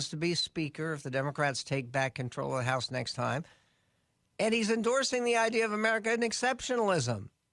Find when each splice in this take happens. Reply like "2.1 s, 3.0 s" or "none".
none